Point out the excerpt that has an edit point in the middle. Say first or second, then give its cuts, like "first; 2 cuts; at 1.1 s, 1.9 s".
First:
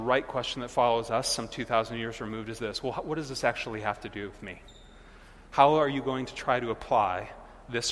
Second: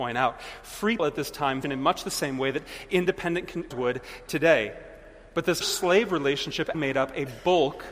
second; 5 cuts; at 1.0 s, 1.6 s, 3.7 s, 5.6 s, 6.7 s